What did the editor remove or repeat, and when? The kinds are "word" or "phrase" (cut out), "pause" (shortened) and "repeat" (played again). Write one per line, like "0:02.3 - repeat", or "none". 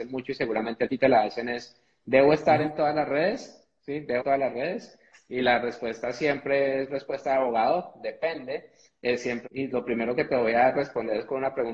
0:01.0 - word
0:04.2 - word
0:09.5 - word